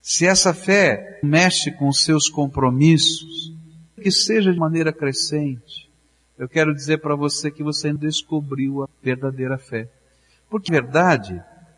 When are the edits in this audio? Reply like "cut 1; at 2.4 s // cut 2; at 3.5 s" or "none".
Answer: cut 1; at 1.2 s // cut 2; at 4.0 s // cut 3; at 4.6 s // cut 4; at 8.0 s // cut 5; at 8.9 s // cut 6; at 10.7 s